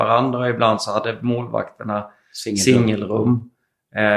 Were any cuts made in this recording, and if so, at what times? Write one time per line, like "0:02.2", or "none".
none